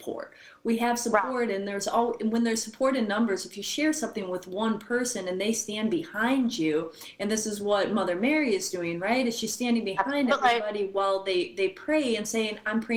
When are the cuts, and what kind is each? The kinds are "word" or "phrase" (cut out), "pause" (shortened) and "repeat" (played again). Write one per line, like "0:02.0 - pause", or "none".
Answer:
none